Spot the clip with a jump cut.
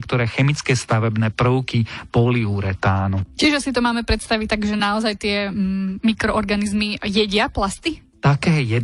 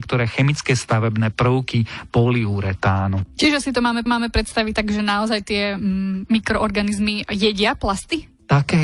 second; 1 cut; at 4.1 s

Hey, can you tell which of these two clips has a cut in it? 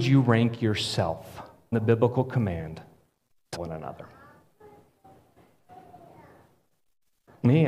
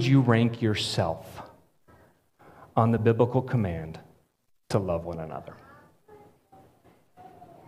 first; 2 cuts; at 1.7 s, 3.6 s

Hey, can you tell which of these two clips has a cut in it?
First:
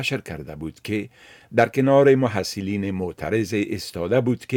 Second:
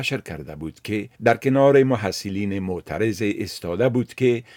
second; 1 cut; at 1.1 s

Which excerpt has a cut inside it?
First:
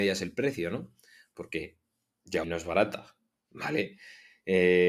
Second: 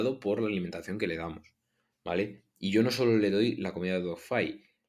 first; 1 cut; at 2.4 s

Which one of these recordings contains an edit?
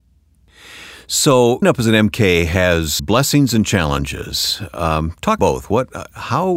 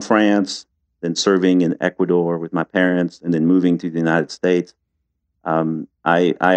first; 3 cuts; at 1.6 s, 3.0 s, 5.4 s

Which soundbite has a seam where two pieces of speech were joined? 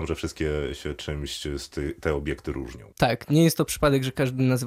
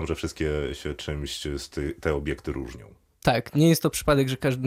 first; 1 cut; at 2.9 s

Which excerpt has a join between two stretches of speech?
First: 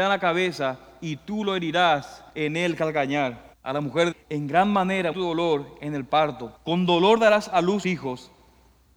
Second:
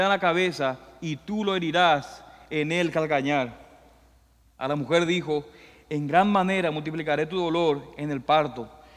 first; 6 cuts; at 2.3 s, 3.5 s, 4.1 s, 5.1 s, 6.6 s, 7.8 s

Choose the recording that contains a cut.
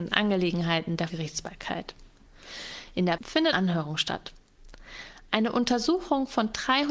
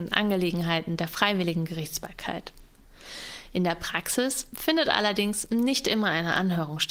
first; 3 cuts; at 1.1 s, 3.2 s, 3.5 s

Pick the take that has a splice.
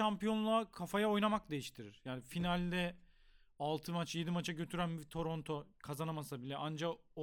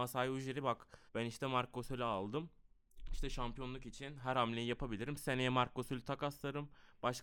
second; 1 cut; at 1.1 s

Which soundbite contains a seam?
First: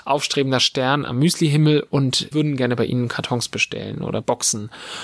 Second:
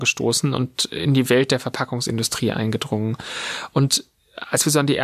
first; 1 cut; at 2.3 s

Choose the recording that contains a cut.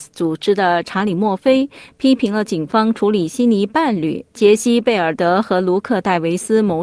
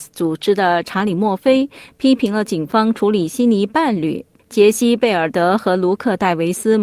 first; 1 cut; at 4.3 s

